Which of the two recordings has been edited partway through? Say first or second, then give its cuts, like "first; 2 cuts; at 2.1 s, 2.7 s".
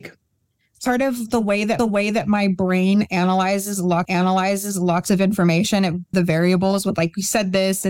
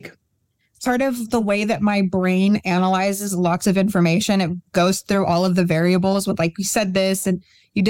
first; 3 cuts; at 1.8 s, 4.0 s, 6.1 s